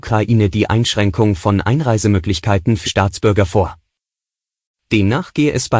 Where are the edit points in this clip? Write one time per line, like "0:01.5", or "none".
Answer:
0:02.8